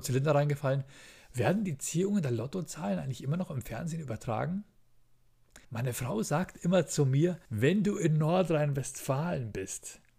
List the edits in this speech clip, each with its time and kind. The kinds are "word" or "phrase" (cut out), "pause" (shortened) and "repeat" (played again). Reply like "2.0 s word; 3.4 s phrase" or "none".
5.6 s pause; 7.5 s pause